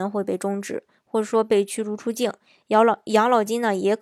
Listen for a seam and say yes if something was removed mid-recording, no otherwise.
no